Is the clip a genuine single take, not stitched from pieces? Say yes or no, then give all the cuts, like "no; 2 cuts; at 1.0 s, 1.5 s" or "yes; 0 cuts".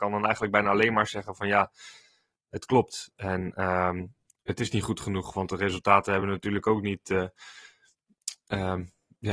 yes; 0 cuts